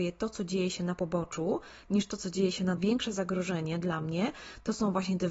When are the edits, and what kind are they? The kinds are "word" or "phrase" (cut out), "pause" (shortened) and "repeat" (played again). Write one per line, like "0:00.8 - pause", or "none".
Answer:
0:02.8 - phrase

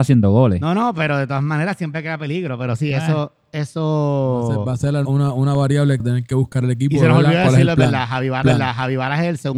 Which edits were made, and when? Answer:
0:05.0 - word
0:06.0 - word
0:08.4 - repeat

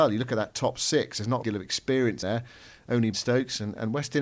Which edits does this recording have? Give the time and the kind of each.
0:01.4 - phrase
0:02.2 - word
0:03.1 - word

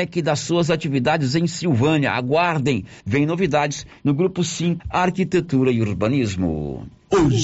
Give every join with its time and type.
0:03.0 - pause
0:04.8 - word

